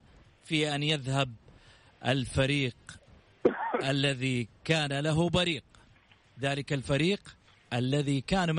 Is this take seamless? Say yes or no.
yes